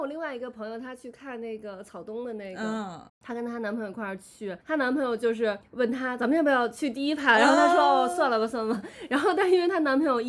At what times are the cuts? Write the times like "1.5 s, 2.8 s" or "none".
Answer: 3.1 s, 4.6 s, 5.6 s